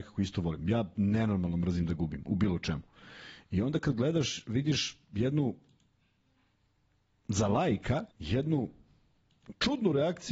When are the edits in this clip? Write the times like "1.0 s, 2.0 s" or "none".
8.1 s